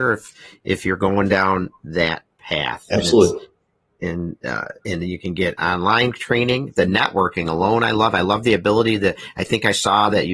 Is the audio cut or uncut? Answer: uncut